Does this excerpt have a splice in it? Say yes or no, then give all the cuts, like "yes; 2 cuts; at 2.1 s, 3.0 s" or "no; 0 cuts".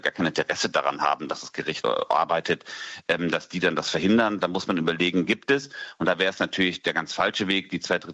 yes; 2 cuts; at 1.8 s, 5.3 s